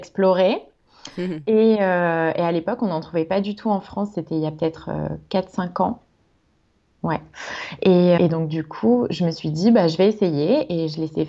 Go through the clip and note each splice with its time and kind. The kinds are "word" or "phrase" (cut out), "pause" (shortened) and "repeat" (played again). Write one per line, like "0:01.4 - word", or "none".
0:08.2 - word